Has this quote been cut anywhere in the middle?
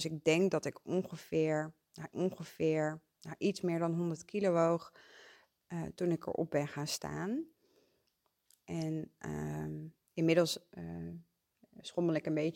yes; 1 cut; at 2.1 s

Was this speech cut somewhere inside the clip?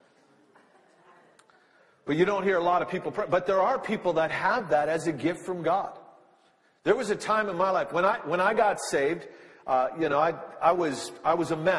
no; 0 cuts

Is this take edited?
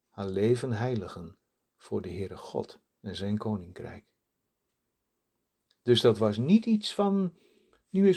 yes; 1 cut; at 2.9 s

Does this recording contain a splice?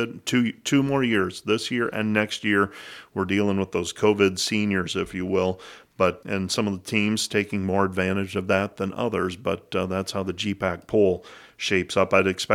yes; 1 cut; at 6.2 s

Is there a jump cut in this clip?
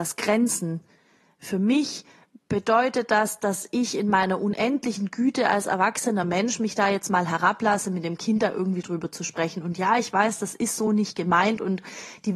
no; 0 cuts

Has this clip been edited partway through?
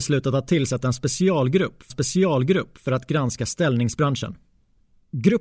yes; 1 cut; at 1.9 s

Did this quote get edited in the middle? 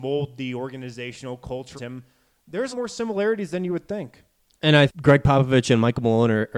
yes; 3 cuts; at 1.8 s, 2.7 s, 4.9 s

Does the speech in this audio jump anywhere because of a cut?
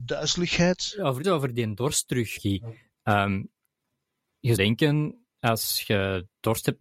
yes; 3 cuts; at 1.2 s, 2.4 s, 4.6 s

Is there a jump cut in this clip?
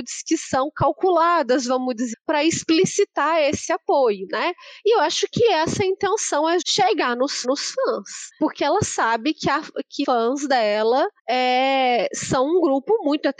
yes; 5 cuts; at 2.1 s, 6.6 s, 7.4 s, 10.0 s, 11.2 s

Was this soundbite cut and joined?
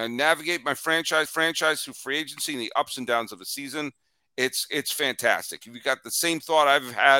yes; 1 cut; at 1.3 s

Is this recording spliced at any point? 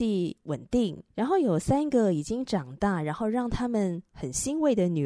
yes; 1 cut; at 1.1 s

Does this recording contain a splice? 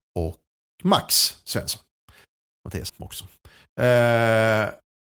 yes; 1 cut; at 2.9 s

